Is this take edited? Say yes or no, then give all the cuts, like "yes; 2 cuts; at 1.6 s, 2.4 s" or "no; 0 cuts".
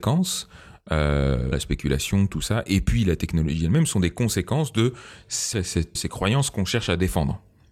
yes; 3 cuts; at 1.5 s, 5.5 s, 6.0 s